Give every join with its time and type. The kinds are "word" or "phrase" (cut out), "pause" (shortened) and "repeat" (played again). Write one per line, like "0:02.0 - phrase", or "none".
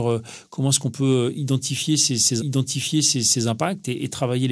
0:02.4 - repeat